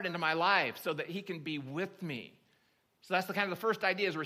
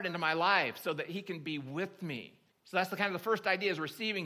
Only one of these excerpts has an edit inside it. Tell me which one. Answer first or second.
second